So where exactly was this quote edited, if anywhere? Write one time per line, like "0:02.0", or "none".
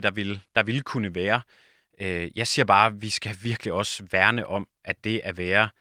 none